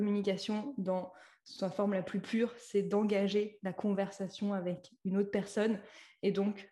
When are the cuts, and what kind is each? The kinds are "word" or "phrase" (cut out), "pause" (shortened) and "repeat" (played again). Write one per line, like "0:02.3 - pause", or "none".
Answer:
none